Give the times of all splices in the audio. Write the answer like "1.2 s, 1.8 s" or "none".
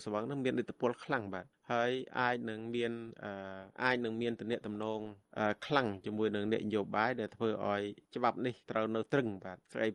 8.6 s

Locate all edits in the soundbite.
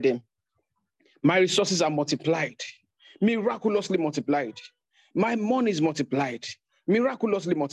none

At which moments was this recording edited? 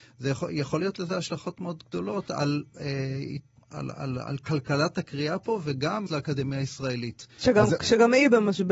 3.6 s, 6.1 s

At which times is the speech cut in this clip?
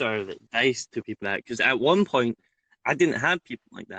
1.2 s

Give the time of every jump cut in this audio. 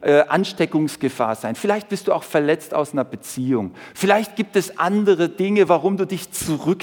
none

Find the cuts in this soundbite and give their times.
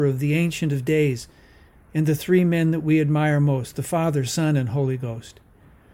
none

